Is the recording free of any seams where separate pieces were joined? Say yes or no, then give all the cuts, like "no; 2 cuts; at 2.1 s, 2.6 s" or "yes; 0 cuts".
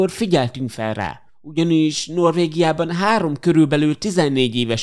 no; 1 cut; at 1.3 s